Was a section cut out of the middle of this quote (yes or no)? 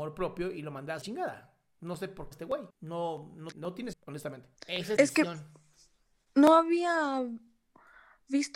yes